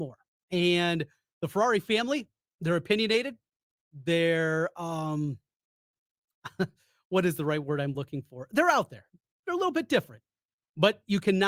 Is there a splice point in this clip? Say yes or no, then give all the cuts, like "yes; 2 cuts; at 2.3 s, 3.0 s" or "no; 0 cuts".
no; 0 cuts